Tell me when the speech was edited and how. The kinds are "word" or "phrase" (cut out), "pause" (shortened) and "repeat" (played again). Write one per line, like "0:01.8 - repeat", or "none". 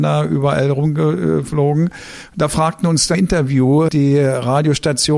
0:03.1 - word
0:03.9 - word